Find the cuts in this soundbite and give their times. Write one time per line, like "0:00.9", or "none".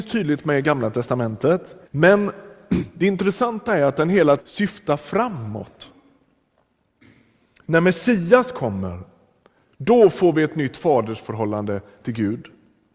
0:01.8
0:04.4